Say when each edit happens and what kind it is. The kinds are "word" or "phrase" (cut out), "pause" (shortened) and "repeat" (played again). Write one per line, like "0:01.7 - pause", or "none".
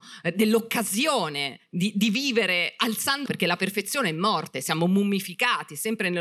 0:03.3 - word